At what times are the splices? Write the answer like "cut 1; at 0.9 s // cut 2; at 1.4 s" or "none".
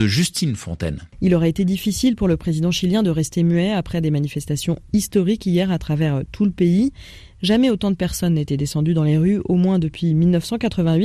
cut 1; at 1.1 s